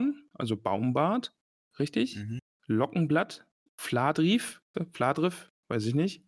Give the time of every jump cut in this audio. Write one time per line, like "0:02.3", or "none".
0:01.6
0:03.7
0:04.7